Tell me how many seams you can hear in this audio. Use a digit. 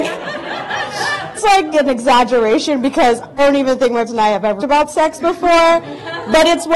5